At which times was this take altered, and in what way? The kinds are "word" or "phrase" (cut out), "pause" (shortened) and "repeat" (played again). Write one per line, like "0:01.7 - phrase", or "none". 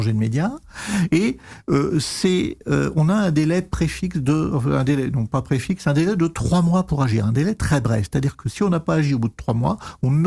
none